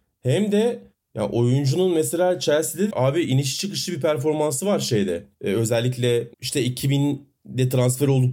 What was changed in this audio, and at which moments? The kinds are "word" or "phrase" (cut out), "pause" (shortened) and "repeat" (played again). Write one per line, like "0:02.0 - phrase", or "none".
0:02.9 - word
0:05.3 - pause
0:06.3 - pause

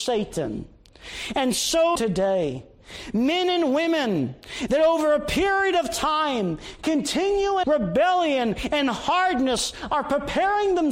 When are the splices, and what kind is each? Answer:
0:02.0 - phrase
0:07.6 - phrase

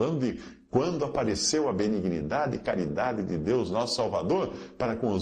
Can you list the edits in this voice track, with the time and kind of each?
none

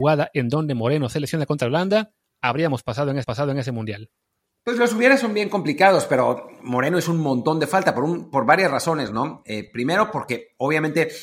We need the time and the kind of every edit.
0:03.2 - repeat

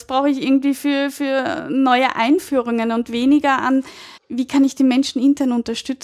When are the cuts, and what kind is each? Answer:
0:04.2 - pause

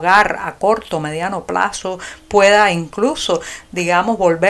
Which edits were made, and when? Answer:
none

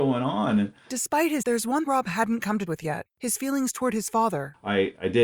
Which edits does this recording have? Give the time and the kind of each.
0:01.4 - word
0:01.9 - word
0:02.7 - word
0:03.1 - pause

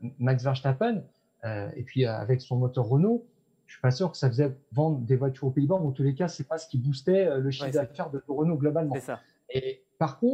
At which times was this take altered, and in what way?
0:02.4 - word

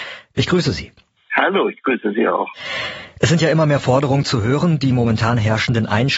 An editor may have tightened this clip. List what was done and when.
none

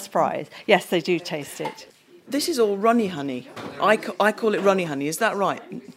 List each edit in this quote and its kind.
none

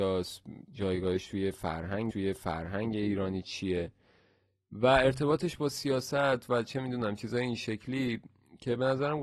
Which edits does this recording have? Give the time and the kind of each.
0:02.1 - repeat

